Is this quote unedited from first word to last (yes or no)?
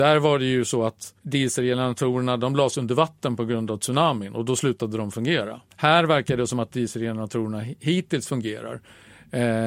no